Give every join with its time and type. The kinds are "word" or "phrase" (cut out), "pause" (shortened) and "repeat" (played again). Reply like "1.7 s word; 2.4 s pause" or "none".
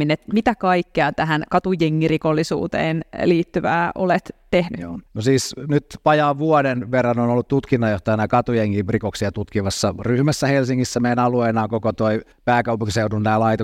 5.1 s pause; 12.3 s pause